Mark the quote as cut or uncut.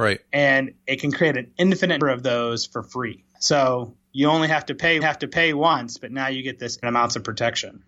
cut